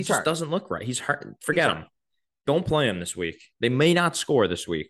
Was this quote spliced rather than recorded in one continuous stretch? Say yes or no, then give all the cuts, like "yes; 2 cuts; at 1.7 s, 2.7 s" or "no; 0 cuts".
no; 0 cuts